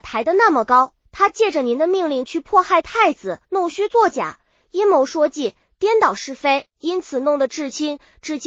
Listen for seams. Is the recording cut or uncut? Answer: cut